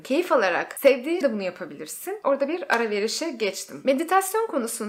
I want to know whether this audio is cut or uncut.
cut